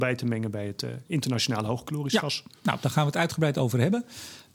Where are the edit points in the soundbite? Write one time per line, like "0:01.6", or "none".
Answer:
none